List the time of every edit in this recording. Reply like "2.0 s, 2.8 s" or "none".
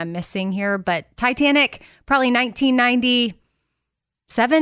none